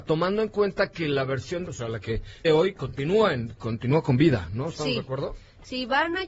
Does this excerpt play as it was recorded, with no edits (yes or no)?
no